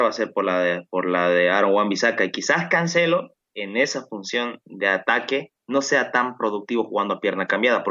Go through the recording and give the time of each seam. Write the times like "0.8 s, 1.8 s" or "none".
3.4 s, 5.6 s